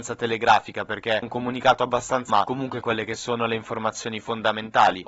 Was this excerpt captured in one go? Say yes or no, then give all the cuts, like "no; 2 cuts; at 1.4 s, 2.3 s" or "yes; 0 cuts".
no; 3 cuts; at 1.2 s, 2.3 s, 2.8 s